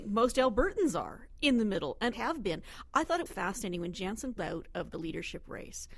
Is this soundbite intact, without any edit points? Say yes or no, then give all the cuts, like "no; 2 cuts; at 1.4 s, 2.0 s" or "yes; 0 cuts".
no; 3 cuts; at 2.1 s, 3.3 s, 4.4 s